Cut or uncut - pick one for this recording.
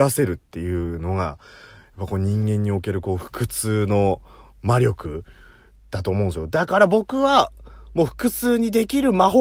uncut